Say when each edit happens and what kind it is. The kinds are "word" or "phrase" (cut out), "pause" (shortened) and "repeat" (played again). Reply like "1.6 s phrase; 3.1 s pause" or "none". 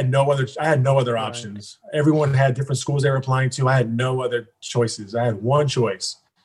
1.8 s pause